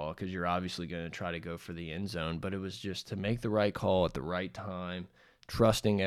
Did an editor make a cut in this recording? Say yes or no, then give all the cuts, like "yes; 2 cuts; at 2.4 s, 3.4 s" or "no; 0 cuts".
no; 0 cuts